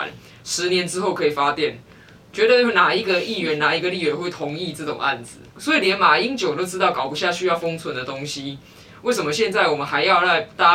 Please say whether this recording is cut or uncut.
cut